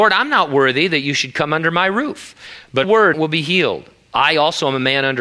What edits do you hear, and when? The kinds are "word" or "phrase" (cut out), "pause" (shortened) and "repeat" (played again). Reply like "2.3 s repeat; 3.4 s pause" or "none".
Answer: 2.8 s phrase; 3.1 s phrase